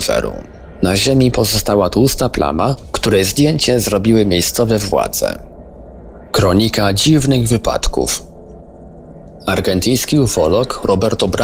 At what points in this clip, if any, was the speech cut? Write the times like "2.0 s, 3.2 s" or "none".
none